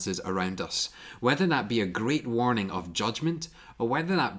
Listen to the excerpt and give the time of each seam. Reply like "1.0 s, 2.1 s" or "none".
none